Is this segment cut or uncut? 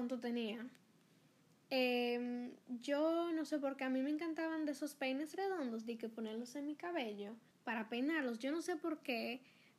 cut